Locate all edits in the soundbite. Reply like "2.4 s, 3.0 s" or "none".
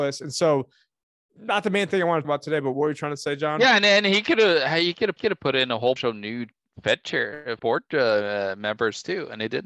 2.2 s, 5.2 s, 6.0 s, 7.6 s

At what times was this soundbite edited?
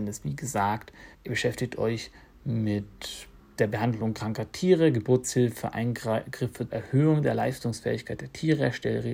1.1 s, 3.4 s, 6.7 s

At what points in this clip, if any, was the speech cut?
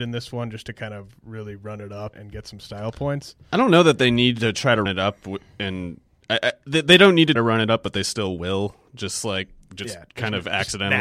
2.1 s, 4.9 s, 7.4 s

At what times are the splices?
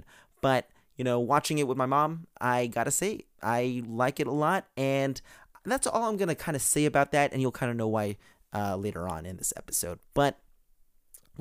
none

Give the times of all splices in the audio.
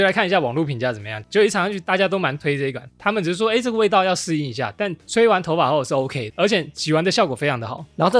6.3 s

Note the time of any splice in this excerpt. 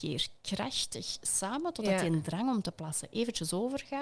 none

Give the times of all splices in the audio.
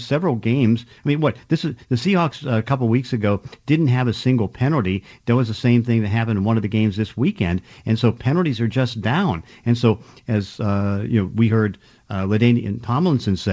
none

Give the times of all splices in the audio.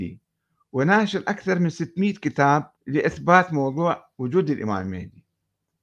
2.8 s

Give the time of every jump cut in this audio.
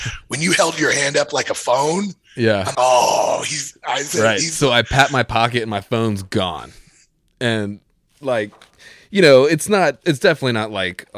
2.7 s, 10.0 s

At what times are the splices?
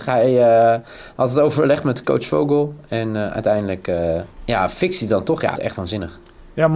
2.0 s, 4.3 s, 5.6 s

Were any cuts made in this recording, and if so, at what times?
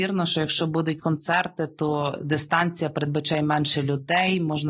1.0 s

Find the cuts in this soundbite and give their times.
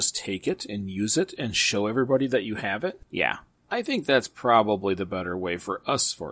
none

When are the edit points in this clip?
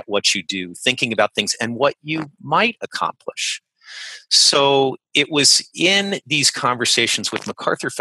none

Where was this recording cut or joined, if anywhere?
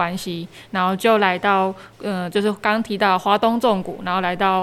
1.9 s

